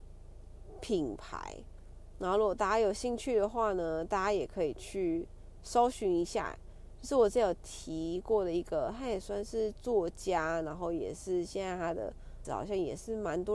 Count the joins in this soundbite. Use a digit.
1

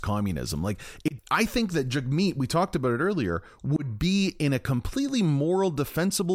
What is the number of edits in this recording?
1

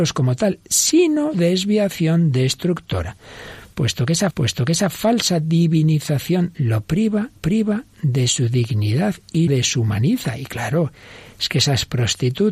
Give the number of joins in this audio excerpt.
5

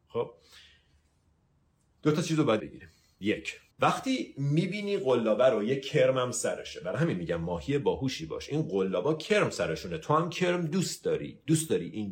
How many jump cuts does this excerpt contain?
2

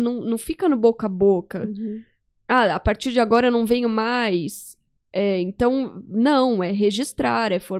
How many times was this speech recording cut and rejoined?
0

